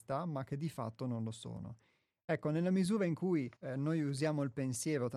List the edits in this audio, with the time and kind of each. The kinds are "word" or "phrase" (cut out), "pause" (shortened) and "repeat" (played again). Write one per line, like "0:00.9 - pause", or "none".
0:03.6 - pause

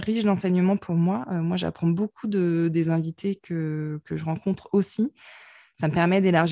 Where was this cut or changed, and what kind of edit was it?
none

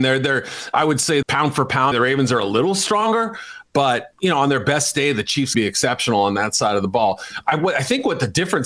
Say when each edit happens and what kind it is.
0:01.2 - word
0:01.9 - word
0:05.5 - word

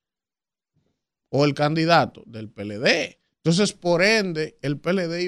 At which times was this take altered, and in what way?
0:03.3 - pause

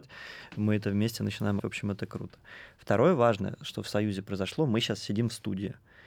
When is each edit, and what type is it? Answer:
0:01.6 - word

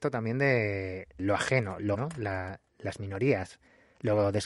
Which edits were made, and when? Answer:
0:01.2 - word
0:01.9 - word

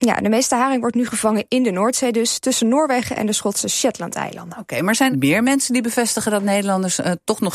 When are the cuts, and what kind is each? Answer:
0:05.1 - word

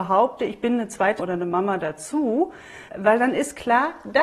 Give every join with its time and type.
0:01.2 - word
0:02.9 - word

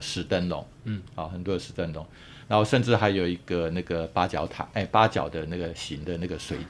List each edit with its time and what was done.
none

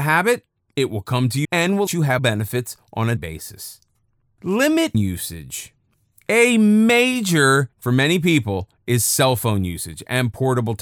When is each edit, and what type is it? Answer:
0:01.4 - word
0:01.9 - word
0:02.2 - word
0:03.2 - word
0:04.9 - word
0:07.7 - word

